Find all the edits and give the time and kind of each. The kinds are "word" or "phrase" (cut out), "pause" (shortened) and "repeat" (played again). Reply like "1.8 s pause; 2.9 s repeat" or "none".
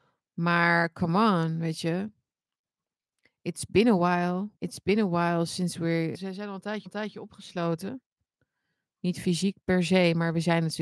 4.6 s pause; 6.1 s word; 6.9 s repeat